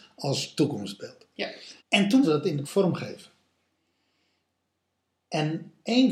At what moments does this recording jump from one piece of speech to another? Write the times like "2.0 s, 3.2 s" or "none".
1.8 s, 2.2 s, 2.6 s